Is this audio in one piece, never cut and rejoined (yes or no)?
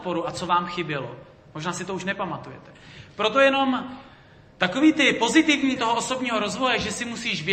no